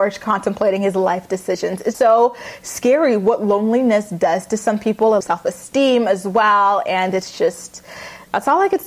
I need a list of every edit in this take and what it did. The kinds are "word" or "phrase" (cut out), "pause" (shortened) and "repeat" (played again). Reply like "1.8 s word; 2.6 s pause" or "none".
1.9 s word; 5.2 s phrase

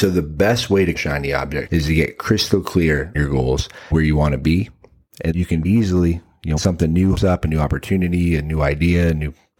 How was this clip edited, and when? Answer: 0.9 s word; 1.7 s word; 3.1 s word; 3.9 s word; 5.3 s word; 5.6 s word; 6.6 s word; 7.1 s word

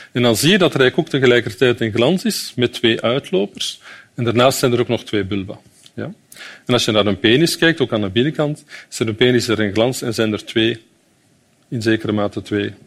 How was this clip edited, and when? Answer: none

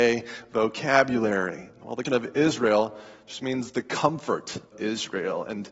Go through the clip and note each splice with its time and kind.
2.1 s word; 4.7 s word

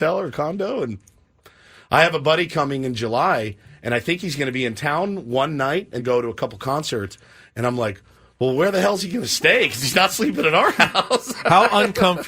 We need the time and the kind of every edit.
6.0 s phrase

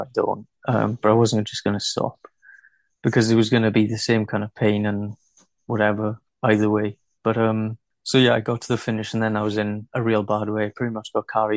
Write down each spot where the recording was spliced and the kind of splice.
none

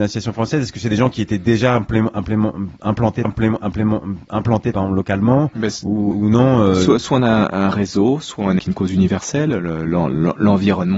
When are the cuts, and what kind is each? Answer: 3.2 s repeat; 6.1 s word; 8.6 s phrase

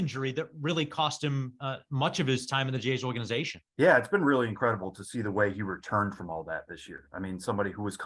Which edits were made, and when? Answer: 3.7 s pause

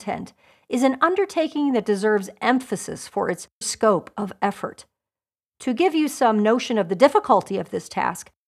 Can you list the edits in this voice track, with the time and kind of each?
3.6 s word

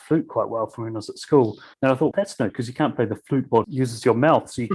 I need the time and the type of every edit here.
1.7 s pause; 2.1 s word; 2.5 s word; 3.6 s phrase

